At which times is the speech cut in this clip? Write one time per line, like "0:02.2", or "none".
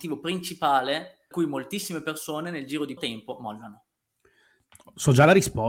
0:01.3
0:03.0